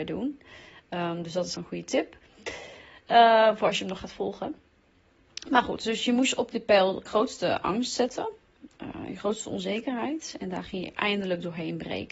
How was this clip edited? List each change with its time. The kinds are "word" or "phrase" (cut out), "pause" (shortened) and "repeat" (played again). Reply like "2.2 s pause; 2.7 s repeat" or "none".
1.5 s word; 7.1 s word

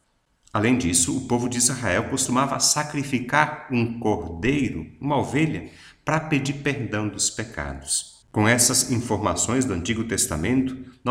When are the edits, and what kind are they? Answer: 8.2 s pause

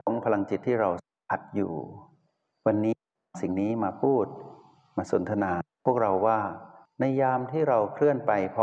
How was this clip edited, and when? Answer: none

